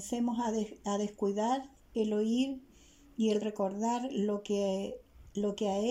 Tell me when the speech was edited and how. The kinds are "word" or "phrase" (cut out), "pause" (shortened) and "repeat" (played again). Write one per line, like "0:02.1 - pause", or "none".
none